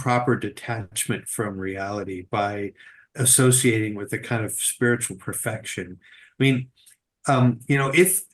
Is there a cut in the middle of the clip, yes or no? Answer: no